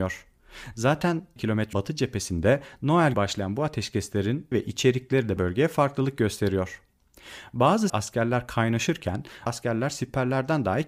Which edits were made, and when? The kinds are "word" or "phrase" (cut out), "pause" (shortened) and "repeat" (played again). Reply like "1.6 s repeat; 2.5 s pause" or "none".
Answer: 1.4 s word; 1.7 s word; 3.1 s word; 4.5 s word; 5.4 s word; 7.9 s word; 9.5 s word